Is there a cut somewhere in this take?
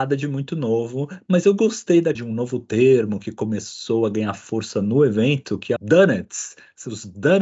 yes; 2 cuts; at 2.1 s, 5.8 s

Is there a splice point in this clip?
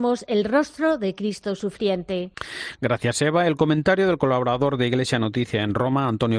no; 0 cuts

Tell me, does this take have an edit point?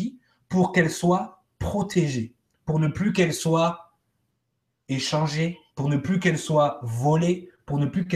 yes; 1 cut; at 5.7 s

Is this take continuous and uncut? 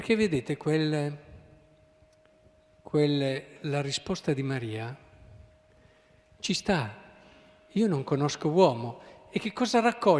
yes; 0 cuts

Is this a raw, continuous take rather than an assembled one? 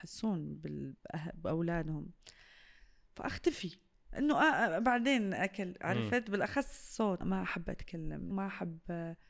no; 2 cuts; at 7.2 s, 8.3 s

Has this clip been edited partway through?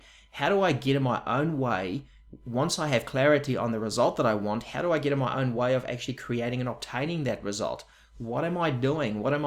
no; 0 cuts

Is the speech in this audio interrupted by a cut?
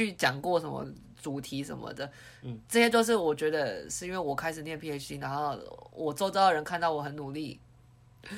no; 0 cuts

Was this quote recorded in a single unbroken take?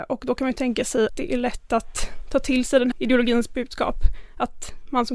no; 2 cuts; at 1.1 s, 2.9 s

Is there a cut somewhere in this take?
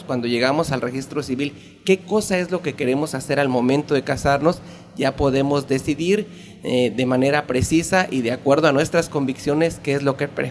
no; 0 cuts

